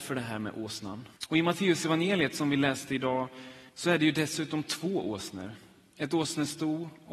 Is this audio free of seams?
no; 2 cuts; at 1.2 s, 3.7 s

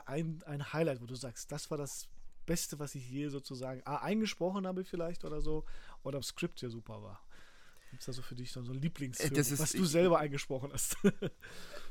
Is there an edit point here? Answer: yes; 1 cut; at 6.2 s

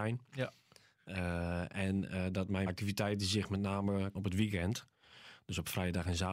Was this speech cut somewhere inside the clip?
yes; 2 cuts; at 2.7 s, 4.1 s

